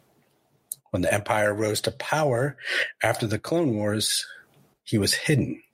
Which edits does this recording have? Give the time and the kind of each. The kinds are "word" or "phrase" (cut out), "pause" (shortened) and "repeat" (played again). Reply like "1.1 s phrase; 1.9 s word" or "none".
none